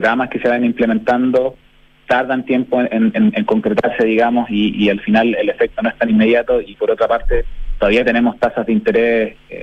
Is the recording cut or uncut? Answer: uncut